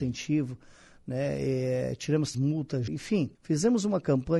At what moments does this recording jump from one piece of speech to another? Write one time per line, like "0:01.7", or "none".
0:02.3
0:02.9
0:03.3